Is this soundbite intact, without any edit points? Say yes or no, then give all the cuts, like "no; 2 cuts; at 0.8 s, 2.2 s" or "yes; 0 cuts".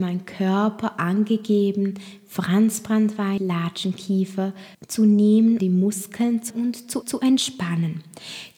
no; 5 cuts; at 3.4 s, 4.7 s, 5.6 s, 6.5 s, 7.0 s